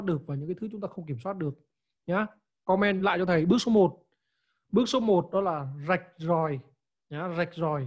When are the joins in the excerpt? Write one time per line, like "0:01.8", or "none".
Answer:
none